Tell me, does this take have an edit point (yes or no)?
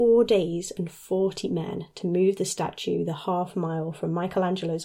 no